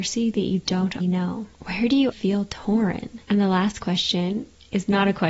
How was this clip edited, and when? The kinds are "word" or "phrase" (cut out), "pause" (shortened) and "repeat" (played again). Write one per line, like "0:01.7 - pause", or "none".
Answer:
0:01.0 - word
0:01.5 - pause
0:02.1 - word
0:03.2 - pause